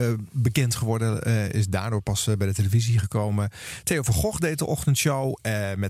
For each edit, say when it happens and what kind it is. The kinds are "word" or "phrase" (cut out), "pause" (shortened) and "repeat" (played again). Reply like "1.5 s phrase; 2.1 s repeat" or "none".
none

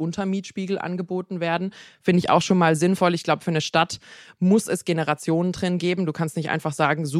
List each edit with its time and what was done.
none

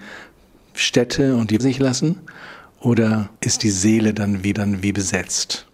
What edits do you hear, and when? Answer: 1.6 s phrase; 3.4 s pause; 4.5 s repeat

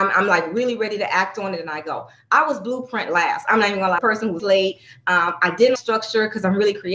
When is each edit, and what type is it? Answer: 4.0 s phrase; 4.4 s word; 5.8 s word

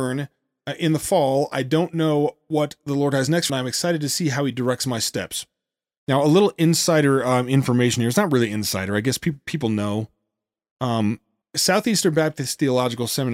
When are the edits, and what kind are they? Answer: 3.5 s phrase; 11.4 s pause

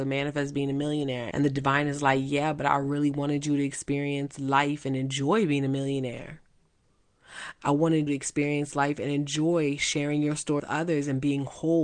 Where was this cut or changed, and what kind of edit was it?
1.3 s word; 8.1 s word; 10.6 s word

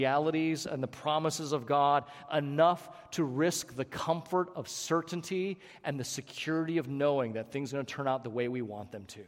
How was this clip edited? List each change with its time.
none

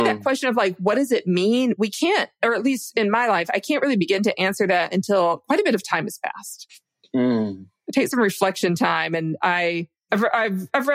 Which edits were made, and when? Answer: none

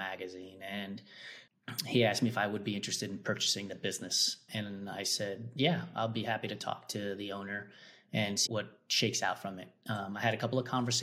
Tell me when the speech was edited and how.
4.5 s word; 8.5 s word

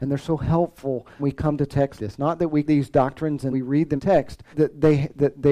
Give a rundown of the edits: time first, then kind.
1.2 s word; 2.0 s word; 2.6 s word; 3.5 s word; 4.0 s word; 4.5 s word

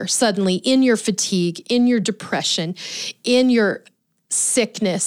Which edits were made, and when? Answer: none

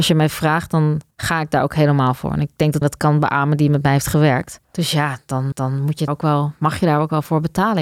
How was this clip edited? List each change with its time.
1.1 s pause; 2.8 s word; 4.6 s pause; 5.5 s repeat; 6.1 s word

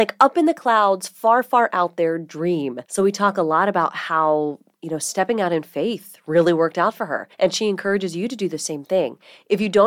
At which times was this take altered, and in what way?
2.9 s pause; 7.3 s pause

